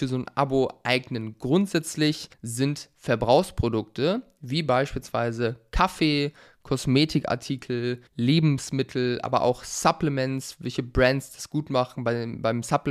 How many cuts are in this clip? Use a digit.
2